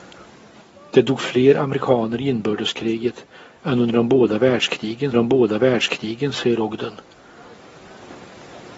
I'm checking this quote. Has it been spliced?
yes; 1 cut; at 5.1 s

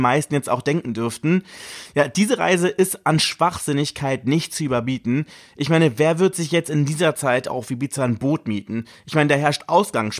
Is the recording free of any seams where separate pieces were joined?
yes; 0 cuts

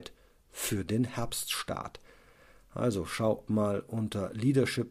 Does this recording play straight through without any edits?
no; 1 cut; at 3.5 s

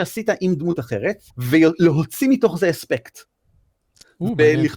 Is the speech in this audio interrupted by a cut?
yes; 1 cut; at 1.3 s

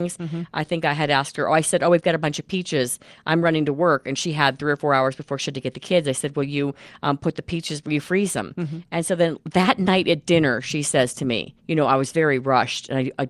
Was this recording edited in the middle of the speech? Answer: yes; 1 cut; at 11.6 s

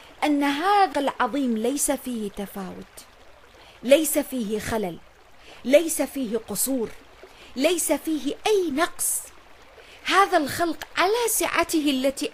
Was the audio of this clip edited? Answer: yes; 1 cut; at 0.9 s

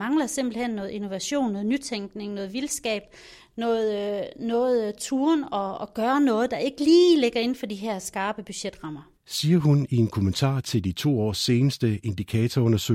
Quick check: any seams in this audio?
yes; 1 cut; at 9.2 s

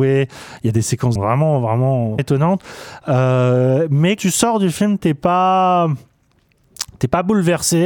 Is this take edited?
yes; 3 cuts; at 1.2 s, 2.2 s, 4.2 s

